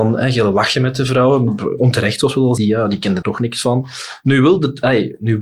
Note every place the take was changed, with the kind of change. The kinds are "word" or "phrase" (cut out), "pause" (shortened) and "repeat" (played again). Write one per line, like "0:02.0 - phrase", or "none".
0:02.6 - word
0:03.2 - word